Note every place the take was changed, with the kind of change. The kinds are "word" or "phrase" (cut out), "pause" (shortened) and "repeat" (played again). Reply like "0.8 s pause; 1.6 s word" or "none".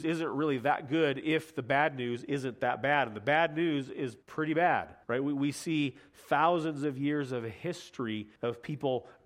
4.2 s pause; 5.0 s pause; 8.4 s pause